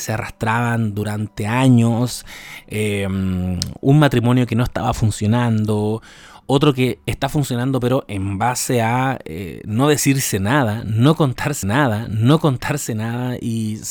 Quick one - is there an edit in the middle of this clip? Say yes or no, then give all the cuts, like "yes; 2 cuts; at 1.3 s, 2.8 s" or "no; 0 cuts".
yes; 1 cut; at 11.6 s